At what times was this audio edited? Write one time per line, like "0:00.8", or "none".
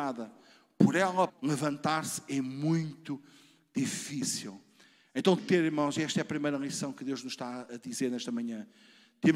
0:01.3
0:05.4
0:07.7